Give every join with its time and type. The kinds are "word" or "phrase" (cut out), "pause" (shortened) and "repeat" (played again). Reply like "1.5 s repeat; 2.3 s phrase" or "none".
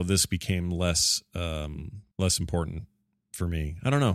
2.1 s pause